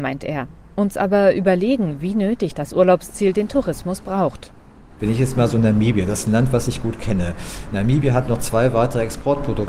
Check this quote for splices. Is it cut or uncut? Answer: uncut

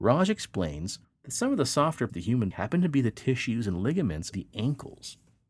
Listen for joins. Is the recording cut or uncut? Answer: cut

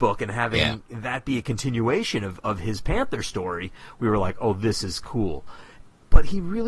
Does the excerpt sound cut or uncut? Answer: uncut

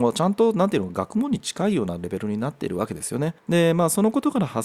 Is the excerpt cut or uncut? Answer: cut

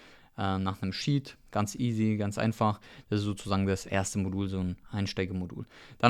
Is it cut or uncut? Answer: uncut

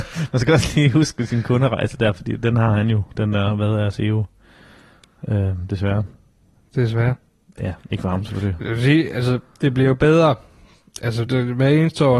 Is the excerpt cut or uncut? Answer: cut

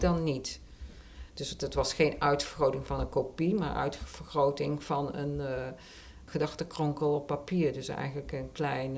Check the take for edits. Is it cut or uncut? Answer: uncut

